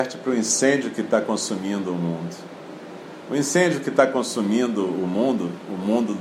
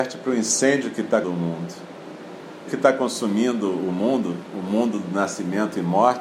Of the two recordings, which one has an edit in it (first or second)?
second